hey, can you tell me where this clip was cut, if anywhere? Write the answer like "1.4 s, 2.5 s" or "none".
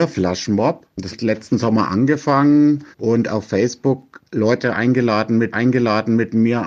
1.1 s, 2.9 s, 5.5 s